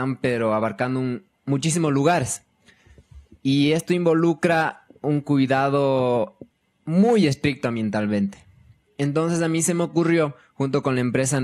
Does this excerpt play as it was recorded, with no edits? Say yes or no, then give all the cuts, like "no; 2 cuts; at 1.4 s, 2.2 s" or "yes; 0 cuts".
yes; 0 cuts